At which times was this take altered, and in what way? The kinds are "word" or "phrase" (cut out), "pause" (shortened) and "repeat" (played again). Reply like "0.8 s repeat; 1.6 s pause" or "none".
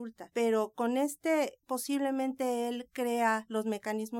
1.6 s word